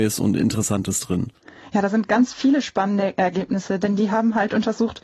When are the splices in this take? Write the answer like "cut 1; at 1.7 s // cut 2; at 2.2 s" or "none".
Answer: none